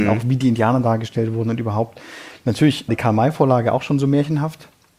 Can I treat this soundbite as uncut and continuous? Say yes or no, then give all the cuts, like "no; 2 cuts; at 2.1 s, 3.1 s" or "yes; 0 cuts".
no; 1 cut; at 2.9 s